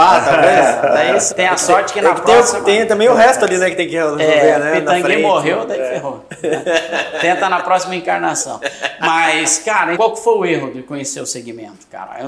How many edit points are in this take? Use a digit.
2